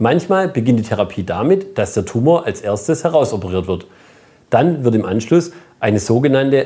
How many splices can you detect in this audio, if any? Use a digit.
0